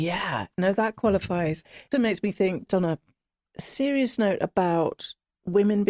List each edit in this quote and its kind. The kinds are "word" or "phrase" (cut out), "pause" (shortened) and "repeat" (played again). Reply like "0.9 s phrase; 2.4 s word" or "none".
1.9 s word; 2.7 s word